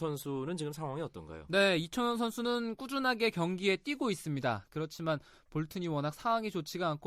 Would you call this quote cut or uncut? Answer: uncut